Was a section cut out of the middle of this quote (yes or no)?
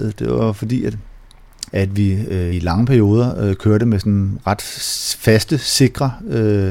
yes